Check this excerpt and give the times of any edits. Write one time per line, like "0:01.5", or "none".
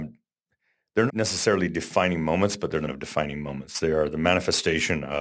0:01.1
0:02.9